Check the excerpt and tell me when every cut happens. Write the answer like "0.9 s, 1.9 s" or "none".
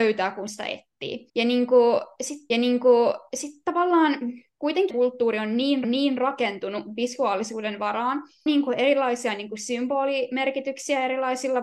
1.3 s, 2.5 s, 4.9 s, 5.8 s, 8.5 s